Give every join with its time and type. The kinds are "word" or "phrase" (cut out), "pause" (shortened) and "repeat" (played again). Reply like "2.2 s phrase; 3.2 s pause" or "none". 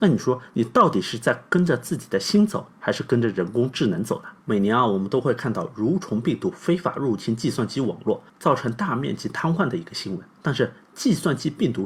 2.7 s pause; 4.4 s pause; 8.3 s pause; 10.4 s pause